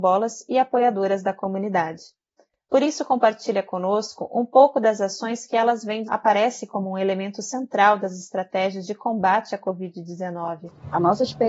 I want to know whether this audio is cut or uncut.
cut